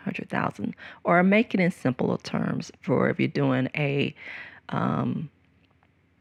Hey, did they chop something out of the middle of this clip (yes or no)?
no